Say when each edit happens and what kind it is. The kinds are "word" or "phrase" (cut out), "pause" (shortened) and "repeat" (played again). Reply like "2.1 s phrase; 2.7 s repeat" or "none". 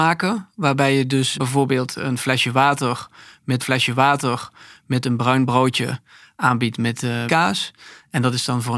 1.3 s word; 3.6 s repeat; 7.3 s word